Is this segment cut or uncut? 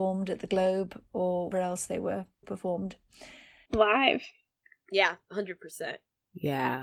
cut